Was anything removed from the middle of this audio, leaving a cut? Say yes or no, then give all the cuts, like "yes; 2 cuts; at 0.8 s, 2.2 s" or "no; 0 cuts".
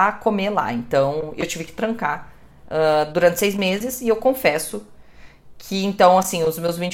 no; 0 cuts